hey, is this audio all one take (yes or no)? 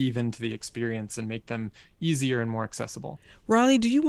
yes